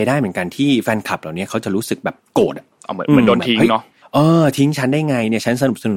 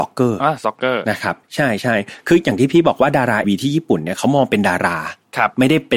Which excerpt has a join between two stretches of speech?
second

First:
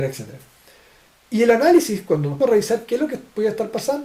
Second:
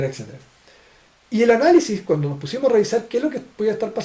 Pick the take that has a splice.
first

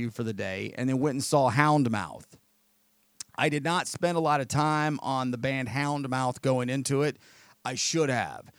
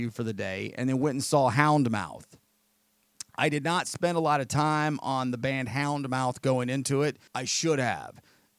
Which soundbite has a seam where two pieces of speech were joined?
second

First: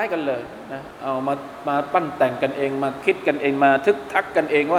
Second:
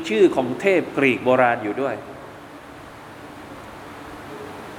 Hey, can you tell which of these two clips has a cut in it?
first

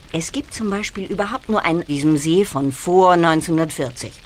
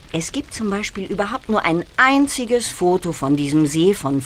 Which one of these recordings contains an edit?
first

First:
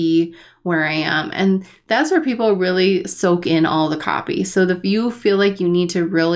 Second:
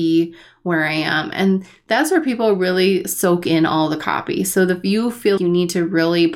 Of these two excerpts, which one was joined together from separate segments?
second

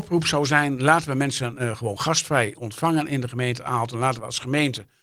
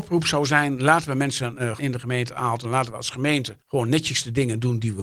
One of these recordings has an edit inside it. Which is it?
second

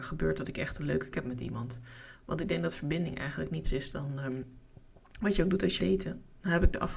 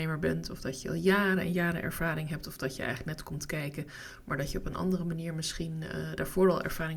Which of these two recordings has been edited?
first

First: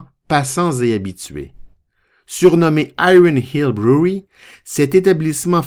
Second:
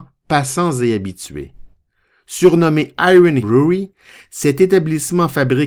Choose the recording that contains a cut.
second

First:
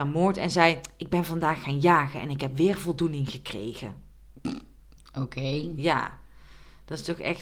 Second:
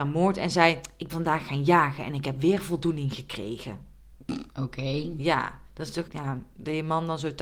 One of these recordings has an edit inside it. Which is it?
second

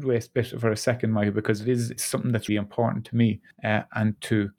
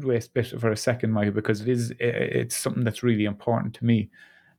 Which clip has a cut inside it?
first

